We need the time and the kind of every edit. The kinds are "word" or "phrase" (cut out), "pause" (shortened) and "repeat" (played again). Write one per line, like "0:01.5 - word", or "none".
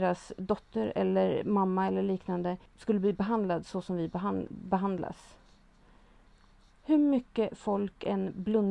0:02.7 - pause